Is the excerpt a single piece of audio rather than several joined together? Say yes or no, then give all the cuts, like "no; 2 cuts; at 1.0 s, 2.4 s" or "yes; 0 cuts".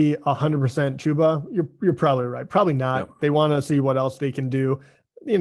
yes; 0 cuts